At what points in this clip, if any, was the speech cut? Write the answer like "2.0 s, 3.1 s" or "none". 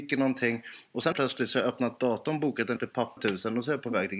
1.1 s, 2.8 s, 3.2 s